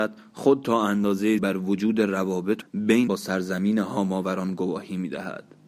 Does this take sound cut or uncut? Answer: cut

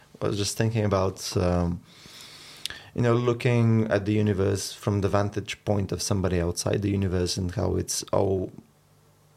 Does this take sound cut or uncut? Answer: uncut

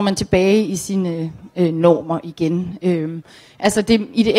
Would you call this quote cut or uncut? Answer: uncut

